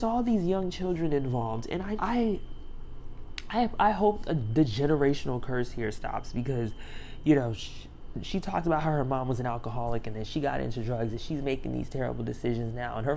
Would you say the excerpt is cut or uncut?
cut